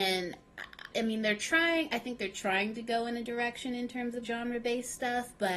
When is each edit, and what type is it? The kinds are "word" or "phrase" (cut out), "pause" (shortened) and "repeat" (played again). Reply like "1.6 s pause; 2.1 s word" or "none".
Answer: 0.9 s word; 3.3 s word; 4.2 s word